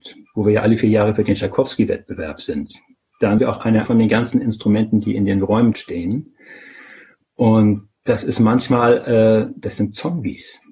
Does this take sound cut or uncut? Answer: cut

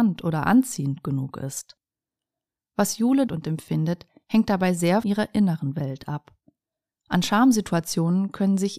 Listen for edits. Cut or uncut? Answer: cut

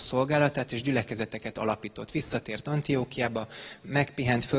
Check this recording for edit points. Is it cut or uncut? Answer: uncut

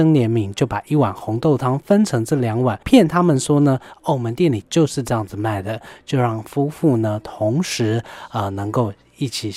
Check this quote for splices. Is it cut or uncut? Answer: cut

